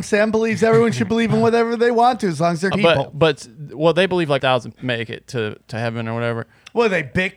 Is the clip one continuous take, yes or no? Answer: no